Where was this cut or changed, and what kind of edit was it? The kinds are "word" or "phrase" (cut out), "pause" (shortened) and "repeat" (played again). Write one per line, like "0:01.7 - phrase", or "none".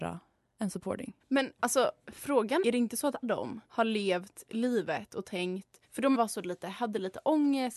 0:01.2 - pause
0:02.6 - word
0:03.2 - word
0:03.6 - pause
0:05.8 - pause
0:06.1 - word